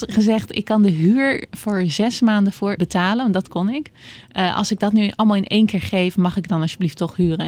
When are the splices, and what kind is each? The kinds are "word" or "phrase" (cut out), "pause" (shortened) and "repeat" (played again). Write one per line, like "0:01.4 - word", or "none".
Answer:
0:02.8 - word